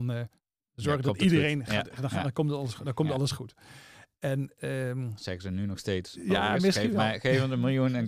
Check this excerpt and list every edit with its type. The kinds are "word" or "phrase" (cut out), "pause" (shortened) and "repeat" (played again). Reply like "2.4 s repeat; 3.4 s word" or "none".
none

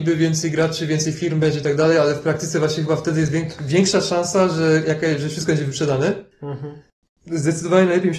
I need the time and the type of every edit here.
none

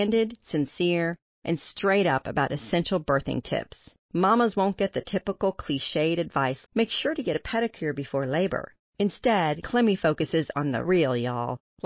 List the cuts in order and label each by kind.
4.0 s pause; 6.7 s word; 10.9 s word

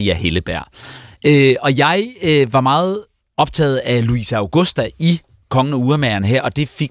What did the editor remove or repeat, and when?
none

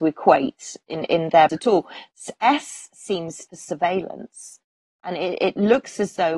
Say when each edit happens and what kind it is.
1.5 s word; 3.5 s word

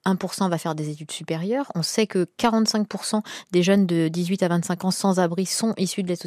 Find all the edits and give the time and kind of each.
none

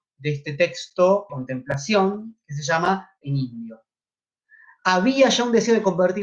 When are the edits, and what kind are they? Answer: 1.3 s word; 3.2 s phrase

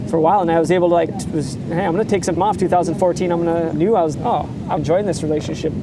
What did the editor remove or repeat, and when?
1.1 s word; 2.4 s word; 3.7 s word; 4.1 s word; 4.8 s word

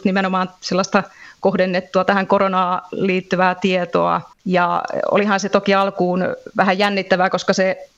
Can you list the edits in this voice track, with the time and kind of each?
4.3 s pause

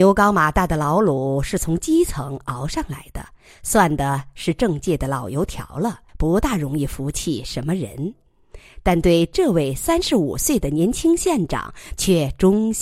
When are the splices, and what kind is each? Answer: 6.1 s pause

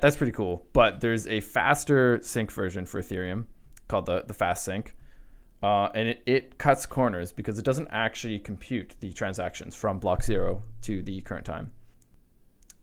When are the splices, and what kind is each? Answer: none

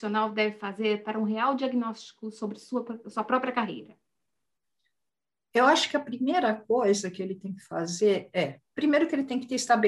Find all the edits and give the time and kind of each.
none

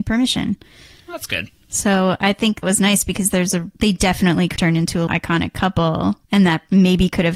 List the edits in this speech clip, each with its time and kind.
2.6 s word; 3.7 s pause; 4.6 s word; 5.1 s word; 6.2 s pause

